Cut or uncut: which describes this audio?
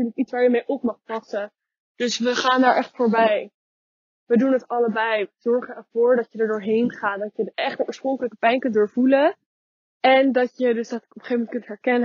uncut